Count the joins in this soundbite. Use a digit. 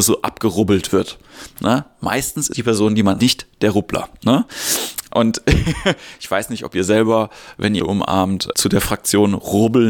4